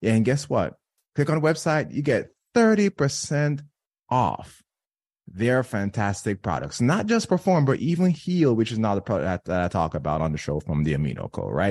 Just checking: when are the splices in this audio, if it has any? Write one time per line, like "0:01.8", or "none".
none